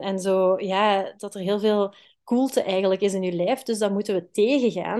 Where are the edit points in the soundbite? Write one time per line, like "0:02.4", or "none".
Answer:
none